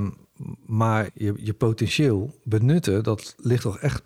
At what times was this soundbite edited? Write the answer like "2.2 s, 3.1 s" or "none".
1.1 s